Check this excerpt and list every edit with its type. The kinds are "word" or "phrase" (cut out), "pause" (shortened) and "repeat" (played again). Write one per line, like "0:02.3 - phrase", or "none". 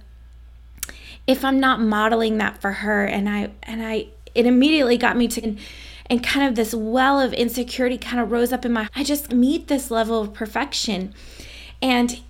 0:05.4 - word
0:08.8 - phrase
0:09.3 - word